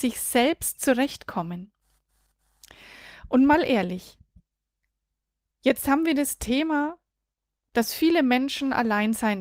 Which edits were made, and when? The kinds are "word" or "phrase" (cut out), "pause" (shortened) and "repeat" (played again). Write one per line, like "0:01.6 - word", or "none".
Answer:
none